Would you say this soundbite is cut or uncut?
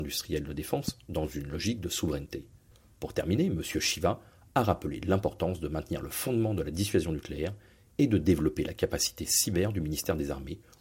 uncut